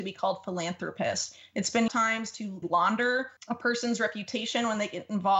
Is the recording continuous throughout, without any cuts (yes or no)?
no